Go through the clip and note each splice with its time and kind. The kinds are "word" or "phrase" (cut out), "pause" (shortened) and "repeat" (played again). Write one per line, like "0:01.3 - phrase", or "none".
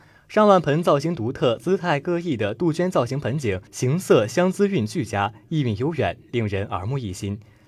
0:03.7 - pause